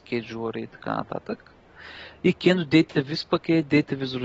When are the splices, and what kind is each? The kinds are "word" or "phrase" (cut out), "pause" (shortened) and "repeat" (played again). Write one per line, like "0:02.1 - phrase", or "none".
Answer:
none